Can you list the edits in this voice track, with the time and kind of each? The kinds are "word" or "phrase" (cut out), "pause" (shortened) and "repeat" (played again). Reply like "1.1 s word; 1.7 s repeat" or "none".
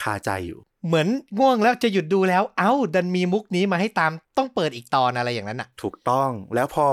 4.2 s pause